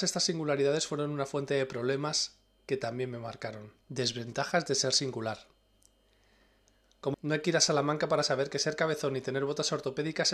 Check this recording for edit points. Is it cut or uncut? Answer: cut